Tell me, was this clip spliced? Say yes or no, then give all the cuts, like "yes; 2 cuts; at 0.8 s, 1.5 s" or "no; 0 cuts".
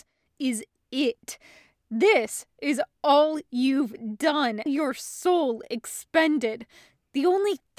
yes; 1 cut; at 4.7 s